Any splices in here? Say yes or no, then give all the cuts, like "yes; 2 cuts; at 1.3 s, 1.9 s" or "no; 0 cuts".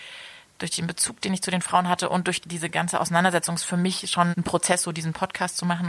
yes; 2 cuts; at 2.4 s, 4.3 s